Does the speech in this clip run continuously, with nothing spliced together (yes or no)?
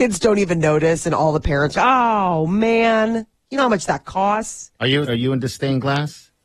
no